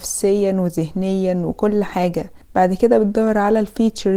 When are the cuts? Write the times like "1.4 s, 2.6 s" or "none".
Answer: none